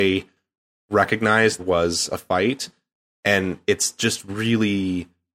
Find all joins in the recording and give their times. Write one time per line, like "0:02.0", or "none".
0:01.6